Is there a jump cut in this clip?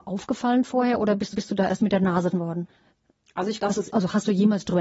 yes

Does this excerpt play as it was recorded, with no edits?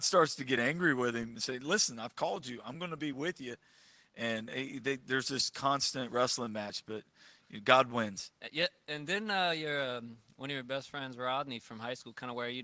yes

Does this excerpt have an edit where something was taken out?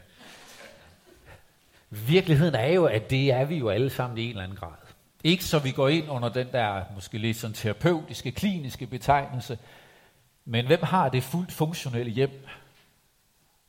no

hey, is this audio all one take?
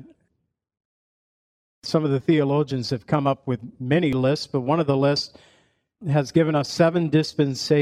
yes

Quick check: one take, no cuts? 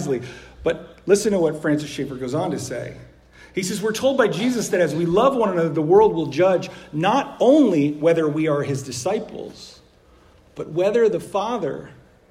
yes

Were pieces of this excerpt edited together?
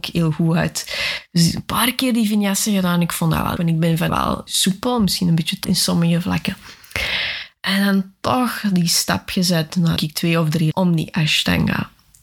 yes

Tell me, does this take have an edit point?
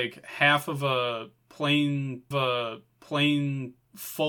yes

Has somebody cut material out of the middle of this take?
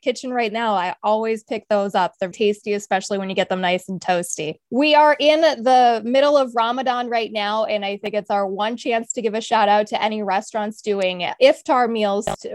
yes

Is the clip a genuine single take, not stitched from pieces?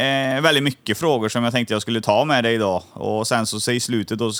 yes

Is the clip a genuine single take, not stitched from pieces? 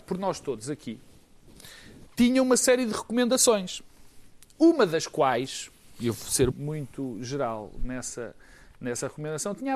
no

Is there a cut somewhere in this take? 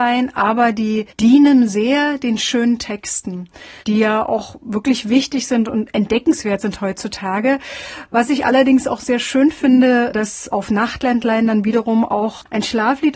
yes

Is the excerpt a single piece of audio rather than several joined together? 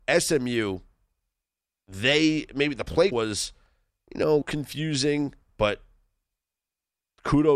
no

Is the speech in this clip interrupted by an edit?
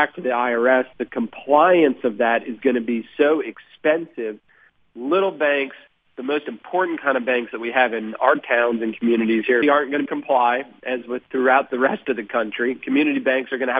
yes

